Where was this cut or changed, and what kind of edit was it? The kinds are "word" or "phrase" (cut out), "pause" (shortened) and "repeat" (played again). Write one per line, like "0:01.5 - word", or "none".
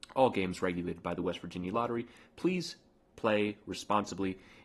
none